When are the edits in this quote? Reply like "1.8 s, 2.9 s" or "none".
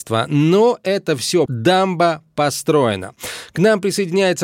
1.5 s